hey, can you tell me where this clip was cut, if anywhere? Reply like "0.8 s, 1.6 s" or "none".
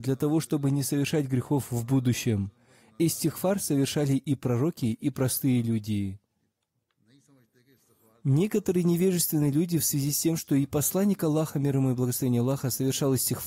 none